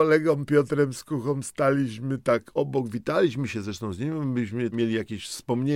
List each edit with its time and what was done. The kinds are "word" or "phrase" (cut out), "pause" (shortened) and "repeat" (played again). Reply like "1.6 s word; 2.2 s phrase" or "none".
4.7 s word